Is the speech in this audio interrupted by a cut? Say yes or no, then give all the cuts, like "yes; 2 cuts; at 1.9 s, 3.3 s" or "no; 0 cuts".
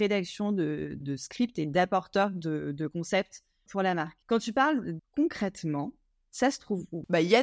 yes; 4 cuts; at 1.0 s, 3.7 s, 4.2 s, 5.0 s